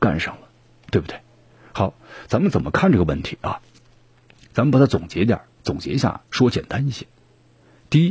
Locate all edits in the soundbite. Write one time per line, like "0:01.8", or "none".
none